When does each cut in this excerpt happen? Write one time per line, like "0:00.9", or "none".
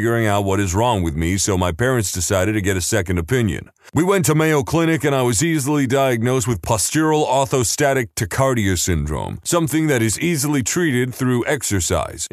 none